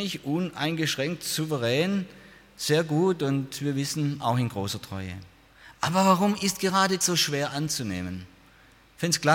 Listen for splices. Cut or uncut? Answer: cut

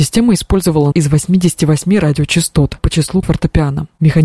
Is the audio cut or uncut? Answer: cut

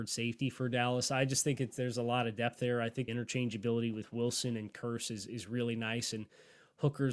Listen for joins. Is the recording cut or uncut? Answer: cut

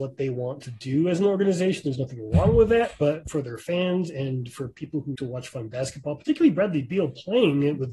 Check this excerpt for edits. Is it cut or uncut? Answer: cut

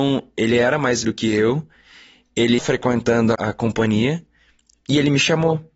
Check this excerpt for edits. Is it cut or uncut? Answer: cut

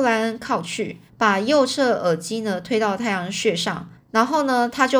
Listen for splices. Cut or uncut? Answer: cut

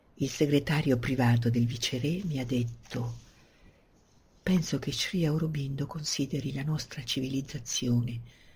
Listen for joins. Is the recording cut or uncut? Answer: uncut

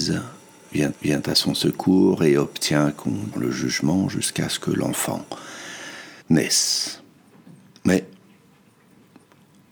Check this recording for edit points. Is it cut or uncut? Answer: cut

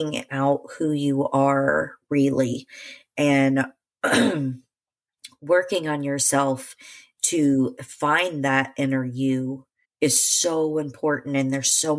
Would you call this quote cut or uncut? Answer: cut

